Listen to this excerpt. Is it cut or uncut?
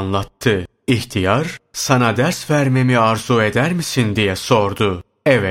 uncut